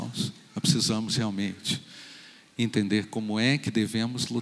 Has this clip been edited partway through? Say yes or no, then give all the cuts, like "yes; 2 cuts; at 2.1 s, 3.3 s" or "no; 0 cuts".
no; 0 cuts